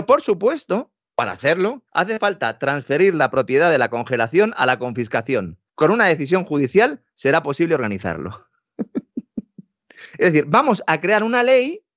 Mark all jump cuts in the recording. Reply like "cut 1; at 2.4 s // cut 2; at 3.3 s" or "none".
cut 1; at 1.1 s // cut 2; at 1.9 s // cut 3; at 5.7 s